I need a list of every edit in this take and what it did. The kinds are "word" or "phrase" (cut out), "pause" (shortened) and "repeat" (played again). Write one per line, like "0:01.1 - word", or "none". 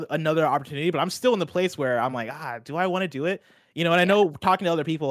none